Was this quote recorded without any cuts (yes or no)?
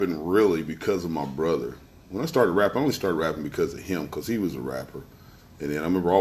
yes